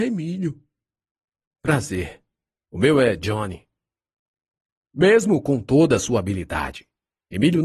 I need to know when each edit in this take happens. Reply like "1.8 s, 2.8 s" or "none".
none